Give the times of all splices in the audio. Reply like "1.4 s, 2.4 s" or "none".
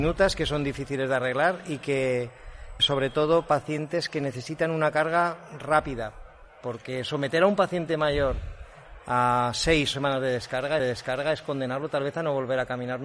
2.8 s, 9.9 s, 10.8 s